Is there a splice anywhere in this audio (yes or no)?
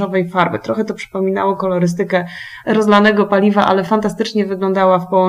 no